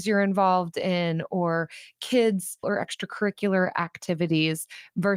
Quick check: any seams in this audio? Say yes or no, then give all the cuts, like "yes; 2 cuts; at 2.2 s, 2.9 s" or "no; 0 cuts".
yes; 1 cut; at 2.6 s